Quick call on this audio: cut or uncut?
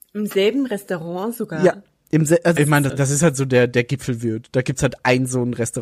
cut